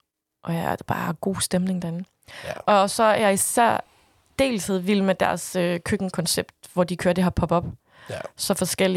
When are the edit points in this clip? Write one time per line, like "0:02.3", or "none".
none